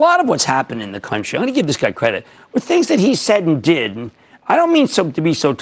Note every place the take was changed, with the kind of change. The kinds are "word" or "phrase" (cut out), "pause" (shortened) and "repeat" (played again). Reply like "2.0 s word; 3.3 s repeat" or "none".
none

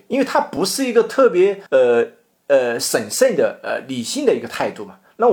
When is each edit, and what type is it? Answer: 1.7 s pause

